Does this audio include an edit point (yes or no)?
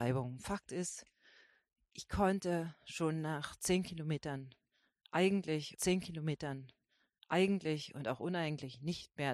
yes